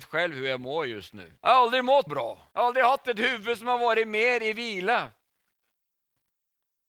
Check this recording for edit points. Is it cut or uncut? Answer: cut